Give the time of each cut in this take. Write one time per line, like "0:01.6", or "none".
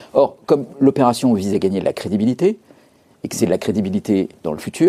none

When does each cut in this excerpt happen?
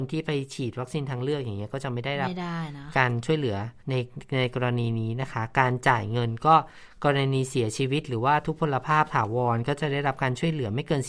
0:03.8

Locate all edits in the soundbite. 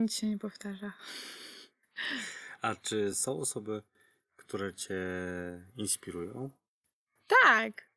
none

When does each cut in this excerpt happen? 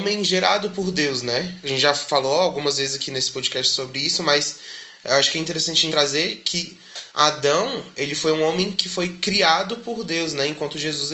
0:05.9
0:07.1

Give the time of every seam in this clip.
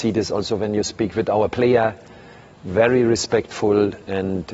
none

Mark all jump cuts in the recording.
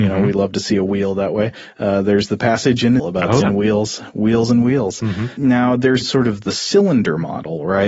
0:03.0
0:03.4
0:06.0

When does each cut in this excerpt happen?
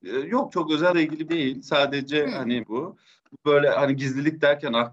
0:00.9
0:01.3
0:02.6

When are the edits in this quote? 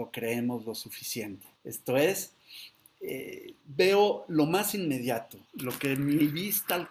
0:01.6
0:03.6
0:05.4

